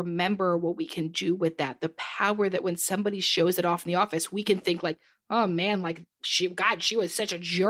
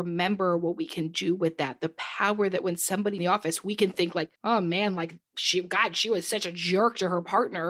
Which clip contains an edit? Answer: second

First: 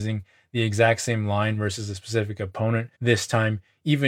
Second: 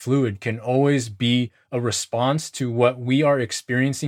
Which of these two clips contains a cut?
first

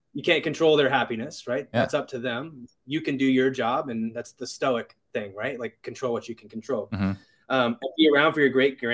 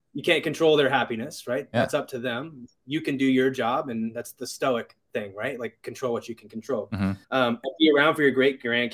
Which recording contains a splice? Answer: second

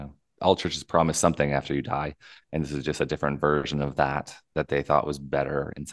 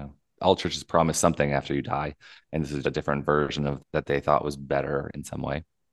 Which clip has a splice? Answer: second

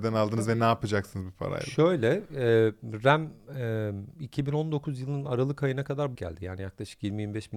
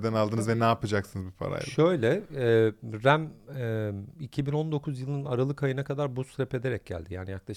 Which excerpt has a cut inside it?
first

